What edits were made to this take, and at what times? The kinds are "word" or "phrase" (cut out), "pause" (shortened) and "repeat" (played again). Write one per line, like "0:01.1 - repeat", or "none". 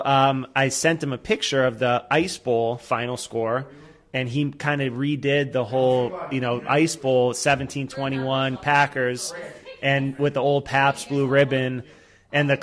none